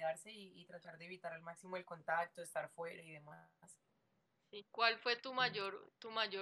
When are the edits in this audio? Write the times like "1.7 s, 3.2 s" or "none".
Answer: 4.7 s